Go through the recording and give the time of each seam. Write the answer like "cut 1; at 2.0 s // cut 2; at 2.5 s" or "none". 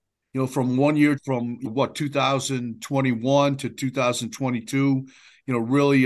cut 1; at 1.2 s // cut 2; at 1.6 s